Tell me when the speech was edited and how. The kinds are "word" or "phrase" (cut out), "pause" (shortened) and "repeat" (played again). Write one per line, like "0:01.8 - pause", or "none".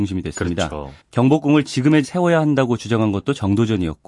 0:01.0 - pause
0:02.0 - word